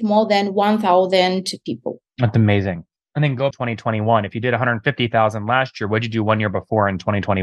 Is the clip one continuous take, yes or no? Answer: no